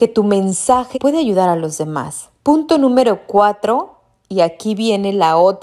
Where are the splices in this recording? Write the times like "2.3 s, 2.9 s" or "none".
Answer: 0.9 s, 2.4 s